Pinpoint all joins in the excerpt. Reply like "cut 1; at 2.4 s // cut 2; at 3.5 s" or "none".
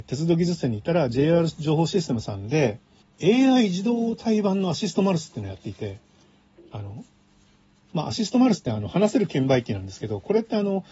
none